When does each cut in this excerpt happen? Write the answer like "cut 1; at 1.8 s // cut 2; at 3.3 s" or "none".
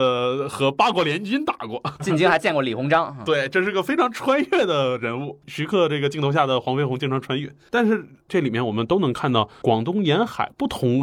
cut 1; at 2.0 s